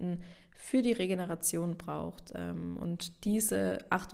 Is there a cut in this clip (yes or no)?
no